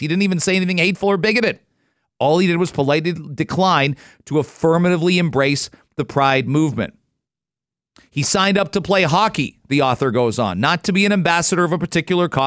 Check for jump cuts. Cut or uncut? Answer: uncut